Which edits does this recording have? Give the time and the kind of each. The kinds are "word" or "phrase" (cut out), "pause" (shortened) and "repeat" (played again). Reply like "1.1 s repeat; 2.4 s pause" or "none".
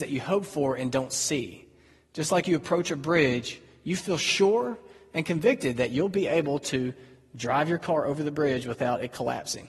none

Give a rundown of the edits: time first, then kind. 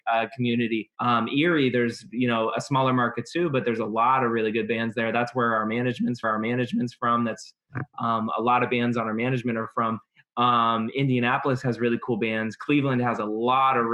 0.9 s pause; 6.2 s repeat

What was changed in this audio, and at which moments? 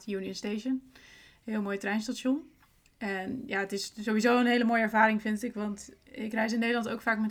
none

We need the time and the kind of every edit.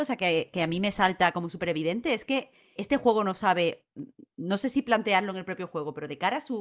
2.8 s word

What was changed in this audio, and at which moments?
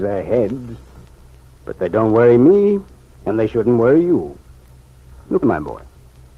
5.4 s word

